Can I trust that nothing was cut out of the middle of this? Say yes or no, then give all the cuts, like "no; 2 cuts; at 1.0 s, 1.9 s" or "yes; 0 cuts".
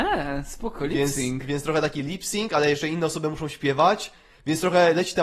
yes; 0 cuts